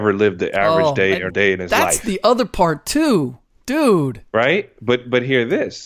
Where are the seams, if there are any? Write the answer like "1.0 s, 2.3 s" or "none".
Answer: 1.3 s